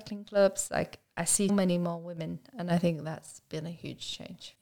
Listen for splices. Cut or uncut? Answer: cut